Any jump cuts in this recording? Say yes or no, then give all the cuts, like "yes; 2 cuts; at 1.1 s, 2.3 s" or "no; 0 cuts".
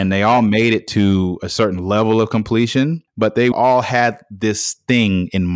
yes; 2 cuts; at 3.1 s, 3.5 s